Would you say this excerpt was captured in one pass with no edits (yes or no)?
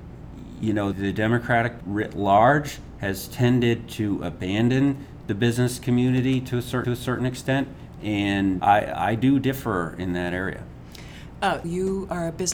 no